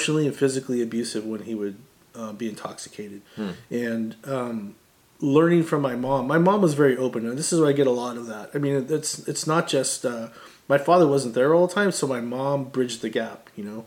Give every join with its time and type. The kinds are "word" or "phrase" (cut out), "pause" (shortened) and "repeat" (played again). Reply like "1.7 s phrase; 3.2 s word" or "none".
2.0 s pause; 3.3 s pause; 5.1 s pause